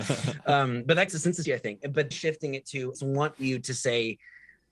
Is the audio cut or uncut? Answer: cut